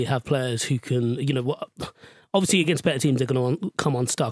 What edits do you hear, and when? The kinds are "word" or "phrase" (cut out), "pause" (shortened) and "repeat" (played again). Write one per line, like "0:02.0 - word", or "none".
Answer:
none

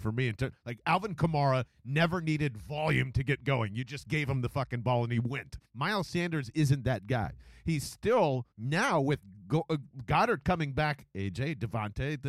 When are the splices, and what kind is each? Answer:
0:05.6 - pause
0:08.5 - pause

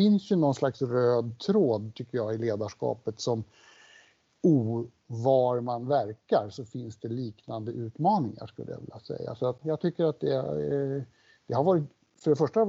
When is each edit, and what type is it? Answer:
0:05.0 - word
0:09.6 - word

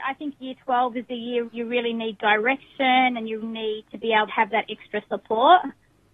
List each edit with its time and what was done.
0:01.5 - word
0:03.4 - word
0:04.3 - word

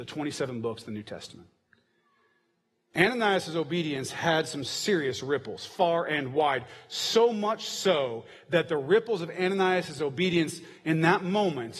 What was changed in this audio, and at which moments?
none

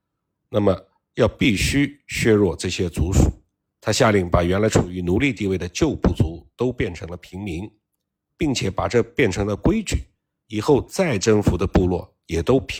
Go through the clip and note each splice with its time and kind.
none

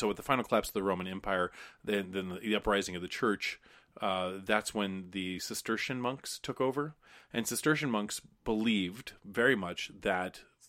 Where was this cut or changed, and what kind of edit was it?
none

